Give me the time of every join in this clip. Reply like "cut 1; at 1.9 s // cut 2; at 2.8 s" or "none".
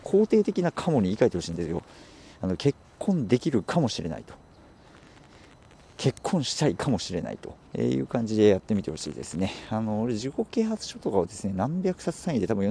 cut 1; at 7.7 s

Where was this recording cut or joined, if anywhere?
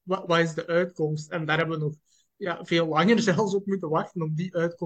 none

